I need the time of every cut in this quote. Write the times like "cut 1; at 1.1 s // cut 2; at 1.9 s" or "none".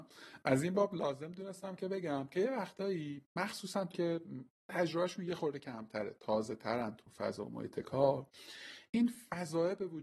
cut 1; at 3.9 s // cut 2; at 8.9 s